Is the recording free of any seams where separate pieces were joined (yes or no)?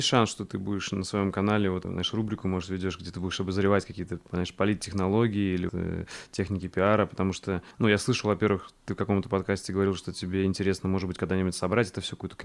no